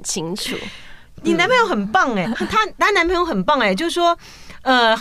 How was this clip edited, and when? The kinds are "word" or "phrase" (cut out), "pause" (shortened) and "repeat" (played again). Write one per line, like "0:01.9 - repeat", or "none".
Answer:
0:02.2 - word

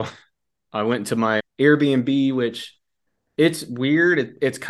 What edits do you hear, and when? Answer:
0:01.4 - word

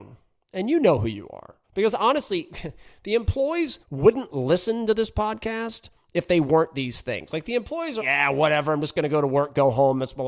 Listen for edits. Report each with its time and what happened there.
0:01.6 - pause
0:03.8 - pause
0:08.0 - word

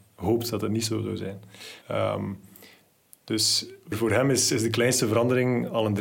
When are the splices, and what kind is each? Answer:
0:01.8 - pause
0:03.9 - word

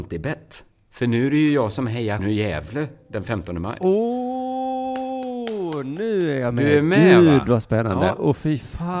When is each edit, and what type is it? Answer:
0:02.2 - word

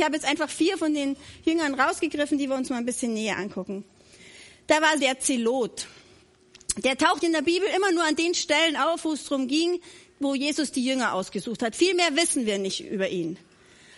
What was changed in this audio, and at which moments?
0:05.0 - word
0:07.2 - word

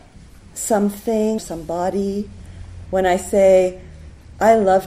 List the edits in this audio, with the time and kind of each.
0:01.4 - word
0:02.9 - word

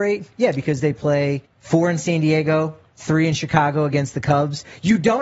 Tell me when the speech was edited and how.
0:01.4 - pause

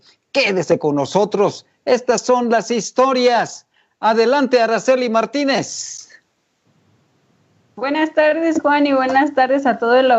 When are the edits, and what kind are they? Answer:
none

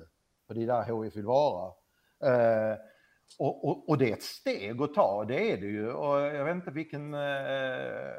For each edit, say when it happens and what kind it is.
none

